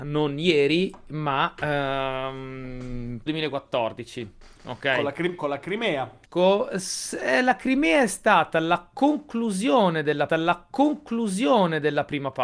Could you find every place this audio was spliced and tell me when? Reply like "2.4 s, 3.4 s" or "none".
3.3 s, 6.3 s, 10.3 s

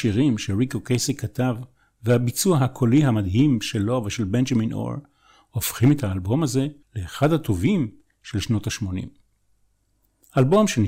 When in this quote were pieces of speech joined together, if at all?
6.8 s

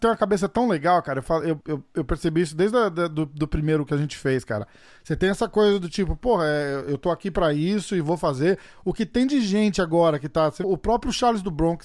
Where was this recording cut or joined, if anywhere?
1.6 s, 10.6 s

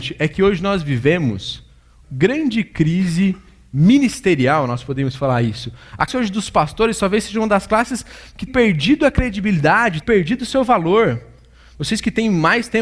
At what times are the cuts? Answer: 2.0 s, 6.1 s, 8.5 s, 10.0 s

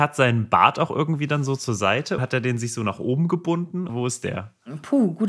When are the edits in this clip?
2.2 s, 3.9 s

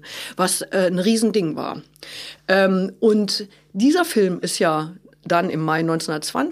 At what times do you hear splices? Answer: none

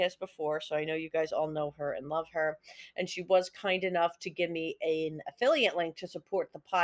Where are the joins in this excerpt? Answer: none

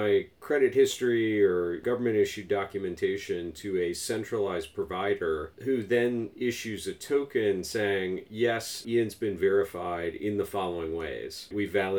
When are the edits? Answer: none

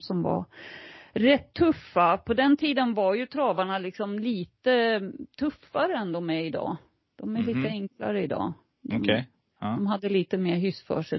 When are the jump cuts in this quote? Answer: none

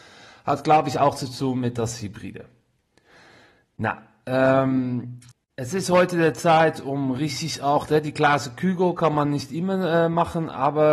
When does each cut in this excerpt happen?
5.3 s

